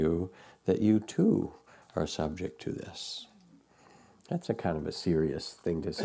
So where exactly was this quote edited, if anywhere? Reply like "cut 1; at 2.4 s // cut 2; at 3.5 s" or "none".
none